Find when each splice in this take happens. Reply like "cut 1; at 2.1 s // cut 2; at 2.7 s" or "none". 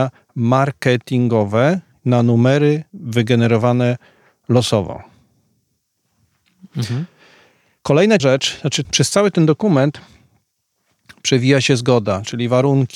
cut 1; at 2.9 s // cut 2; at 8.2 s // cut 3; at 8.8 s